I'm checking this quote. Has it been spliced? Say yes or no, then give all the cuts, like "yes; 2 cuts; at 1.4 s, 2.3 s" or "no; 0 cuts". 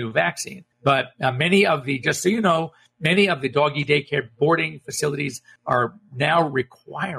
no; 0 cuts